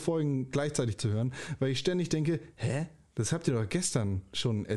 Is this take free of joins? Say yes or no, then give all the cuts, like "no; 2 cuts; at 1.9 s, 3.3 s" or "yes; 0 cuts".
yes; 0 cuts